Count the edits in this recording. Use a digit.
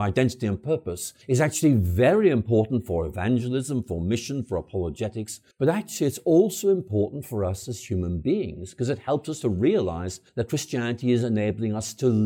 3